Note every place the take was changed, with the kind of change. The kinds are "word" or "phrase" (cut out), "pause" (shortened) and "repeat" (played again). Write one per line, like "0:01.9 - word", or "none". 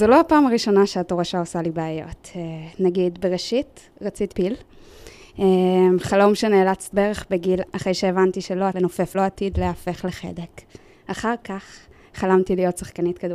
0:04.3 - word
0:06.9 - word
0:07.7 - word
0:08.7 - word
0:09.1 - phrase
0:10.9 - pause